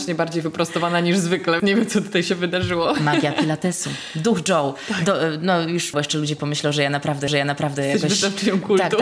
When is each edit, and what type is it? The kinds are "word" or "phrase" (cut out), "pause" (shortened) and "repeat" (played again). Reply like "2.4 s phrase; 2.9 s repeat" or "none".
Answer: 1.6 s word; 5.9 s word; 7.3 s repeat

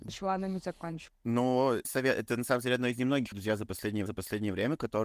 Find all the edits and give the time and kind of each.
1.8 s word; 3.3 s word; 4.1 s repeat

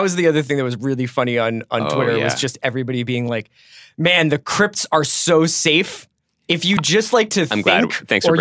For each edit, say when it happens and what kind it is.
none

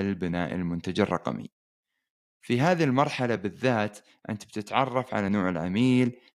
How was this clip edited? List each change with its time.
none

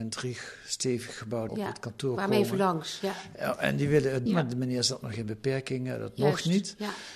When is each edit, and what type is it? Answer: 1.5 s word; 4.3 s word

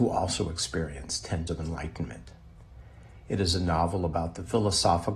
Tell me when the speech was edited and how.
1.5 s word

